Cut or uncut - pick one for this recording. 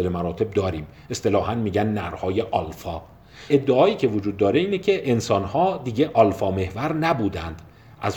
cut